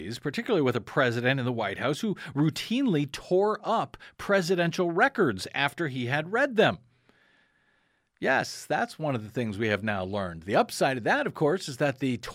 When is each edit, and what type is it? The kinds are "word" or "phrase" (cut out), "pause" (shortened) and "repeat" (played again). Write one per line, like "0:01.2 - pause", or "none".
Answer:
none

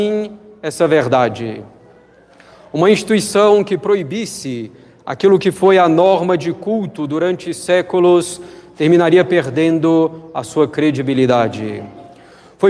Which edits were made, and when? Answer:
none

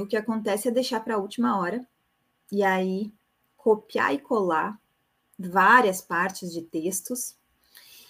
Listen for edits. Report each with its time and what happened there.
none

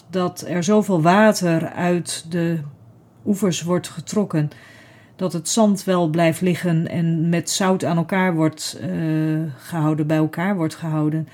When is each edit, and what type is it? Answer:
none

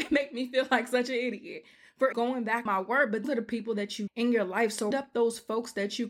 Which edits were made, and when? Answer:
0:02.1 - word
0:02.7 - word
0:03.2 - word
0:04.1 - word
0:04.9 - word

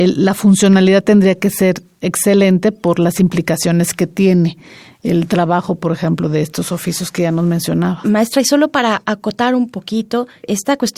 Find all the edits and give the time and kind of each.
none

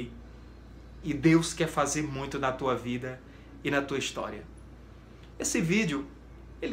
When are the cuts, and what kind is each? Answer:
none

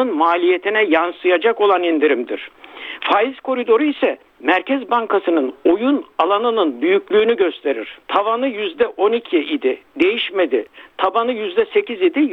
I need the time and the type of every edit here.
0:04.3 - pause
0:08.0 - pause

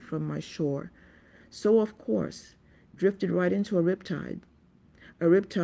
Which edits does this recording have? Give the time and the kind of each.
none

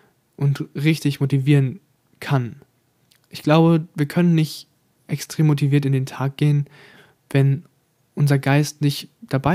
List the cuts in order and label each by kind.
none

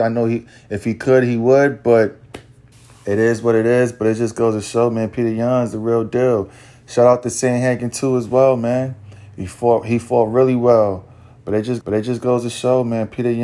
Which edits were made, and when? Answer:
0:02.7 - pause
0:11.8 - repeat

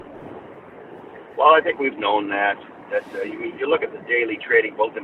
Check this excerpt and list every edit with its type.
0:01.9 - word

